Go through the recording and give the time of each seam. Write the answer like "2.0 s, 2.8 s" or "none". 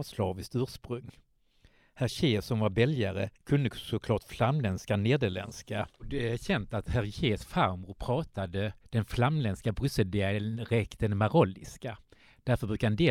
3.3 s